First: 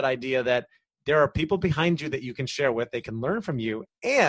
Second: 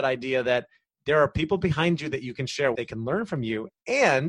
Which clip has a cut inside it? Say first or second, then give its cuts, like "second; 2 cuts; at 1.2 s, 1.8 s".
second; 1 cut; at 2.7 s